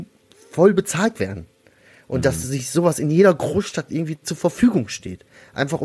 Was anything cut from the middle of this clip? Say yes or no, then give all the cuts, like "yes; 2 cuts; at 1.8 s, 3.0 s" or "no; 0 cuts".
no; 0 cuts